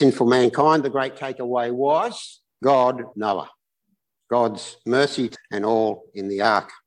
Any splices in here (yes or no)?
yes